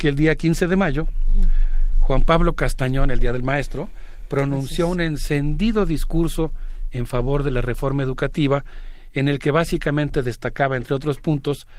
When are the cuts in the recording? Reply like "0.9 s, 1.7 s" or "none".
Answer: none